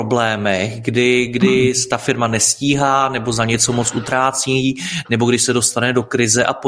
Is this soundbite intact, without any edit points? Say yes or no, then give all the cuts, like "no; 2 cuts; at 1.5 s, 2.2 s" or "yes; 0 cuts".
yes; 0 cuts